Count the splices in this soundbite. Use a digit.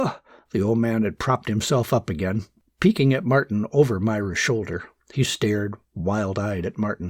0